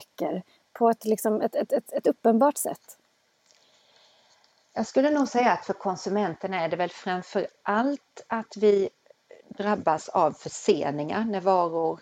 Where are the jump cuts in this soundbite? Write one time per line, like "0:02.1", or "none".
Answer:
none

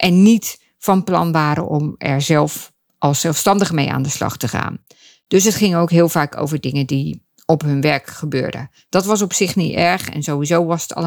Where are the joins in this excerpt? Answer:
none

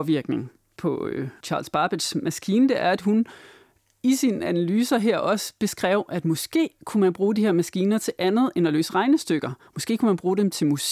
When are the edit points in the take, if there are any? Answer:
none

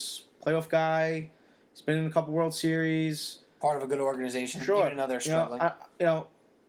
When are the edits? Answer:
none

